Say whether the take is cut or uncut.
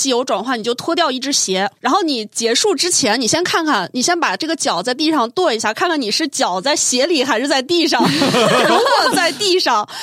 cut